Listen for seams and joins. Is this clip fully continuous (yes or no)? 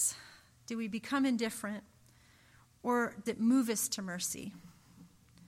no